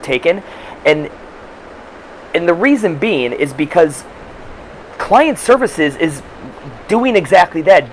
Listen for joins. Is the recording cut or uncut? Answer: uncut